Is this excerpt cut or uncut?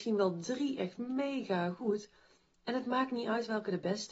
uncut